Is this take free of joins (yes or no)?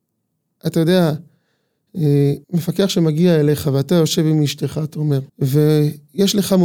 no